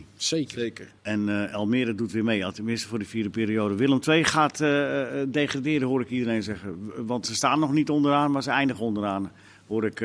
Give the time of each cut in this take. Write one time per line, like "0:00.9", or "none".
0:01.0